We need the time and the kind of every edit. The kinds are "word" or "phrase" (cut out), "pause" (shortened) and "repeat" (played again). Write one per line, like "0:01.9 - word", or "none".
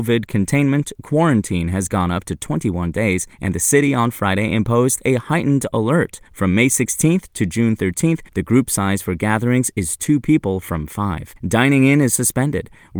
0:03.3 - pause
0:06.3 - pause
0:08.3 - pause
0:11.4 - pause